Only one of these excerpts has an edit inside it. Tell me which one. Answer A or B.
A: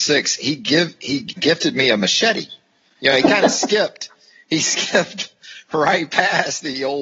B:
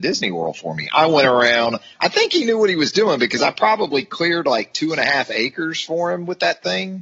A